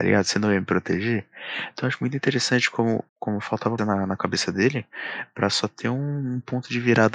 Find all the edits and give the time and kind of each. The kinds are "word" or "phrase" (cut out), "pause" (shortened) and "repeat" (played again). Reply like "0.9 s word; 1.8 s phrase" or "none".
3.1 s pause; 3.8 s phrase